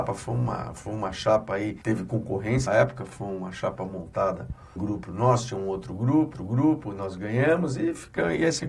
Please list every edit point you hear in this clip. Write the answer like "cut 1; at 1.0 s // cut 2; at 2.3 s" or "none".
cut 1; at 1.8 s // cut 2; at 2.7 s // cut 3; at 4.8 s // cut 4; at 6.3 s